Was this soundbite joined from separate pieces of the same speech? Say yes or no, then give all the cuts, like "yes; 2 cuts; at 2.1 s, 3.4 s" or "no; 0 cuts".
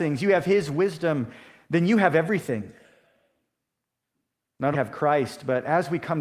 yes; 1 cut; at 4.7 s